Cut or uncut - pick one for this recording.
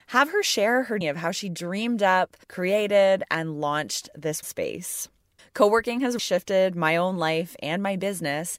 cut